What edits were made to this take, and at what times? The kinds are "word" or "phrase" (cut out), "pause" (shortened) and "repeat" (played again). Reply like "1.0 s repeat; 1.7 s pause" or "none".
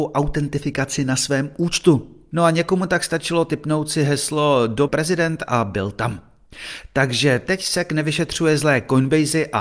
4.9 s word